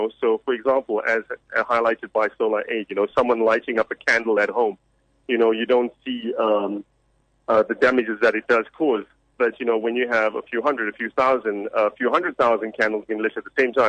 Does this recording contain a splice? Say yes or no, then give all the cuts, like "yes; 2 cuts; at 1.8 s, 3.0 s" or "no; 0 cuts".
no; 0 cuts